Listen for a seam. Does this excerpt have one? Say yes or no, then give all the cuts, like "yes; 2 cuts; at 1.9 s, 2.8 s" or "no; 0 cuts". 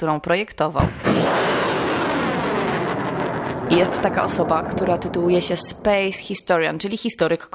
no; 0 cuts